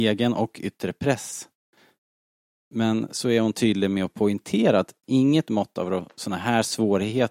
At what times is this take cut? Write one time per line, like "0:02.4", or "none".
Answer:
none